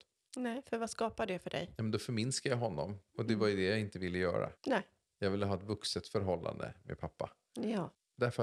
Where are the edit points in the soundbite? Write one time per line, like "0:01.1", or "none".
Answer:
0:03.1
0:04.6